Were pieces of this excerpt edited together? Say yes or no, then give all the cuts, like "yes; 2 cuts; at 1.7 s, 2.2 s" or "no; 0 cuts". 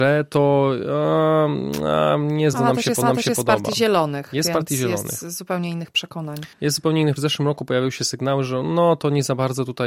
yes; 4 cuts; at 2.5 s, 3.0 s, 6.5 s, 7.2 s